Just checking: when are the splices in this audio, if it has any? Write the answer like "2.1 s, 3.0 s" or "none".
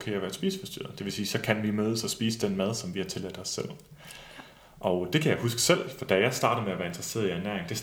none